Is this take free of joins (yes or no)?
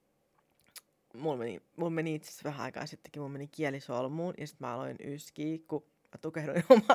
yes